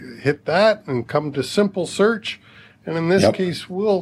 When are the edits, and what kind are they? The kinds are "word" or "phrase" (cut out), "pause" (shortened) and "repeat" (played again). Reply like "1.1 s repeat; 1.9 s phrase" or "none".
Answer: none